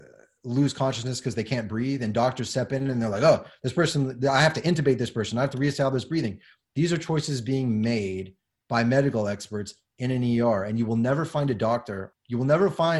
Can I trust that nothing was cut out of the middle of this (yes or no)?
yes